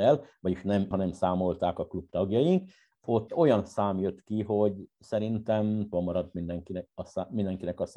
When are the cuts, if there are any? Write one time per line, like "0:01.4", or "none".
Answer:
0:00.9
0:03.3
0:05.9